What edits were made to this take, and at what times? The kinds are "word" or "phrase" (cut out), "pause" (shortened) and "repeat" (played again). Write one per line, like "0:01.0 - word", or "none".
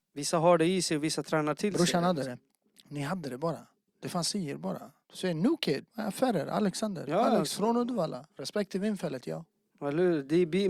0:02.5 - pause
0:05.0 - pause
0:05.9 - pause
0:08.3 - pause